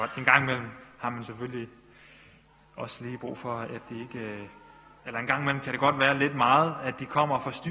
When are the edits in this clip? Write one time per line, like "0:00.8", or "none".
0:05.0